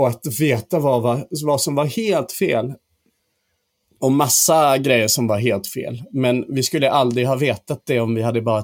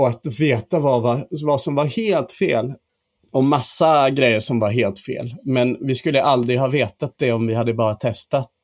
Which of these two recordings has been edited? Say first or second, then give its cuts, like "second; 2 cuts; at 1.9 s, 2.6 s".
second; 1 cut; at 2.9 s